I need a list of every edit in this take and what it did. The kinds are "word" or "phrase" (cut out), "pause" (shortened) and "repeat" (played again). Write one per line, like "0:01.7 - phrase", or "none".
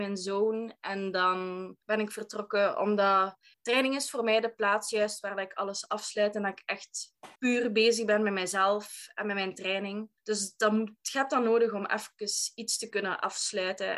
0:01.8 - pause
0:03.5 - pause
0:07.4 - pause
0:10.2 - pause